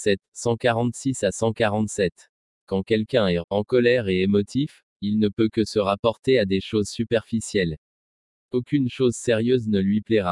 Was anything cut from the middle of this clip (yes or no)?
yes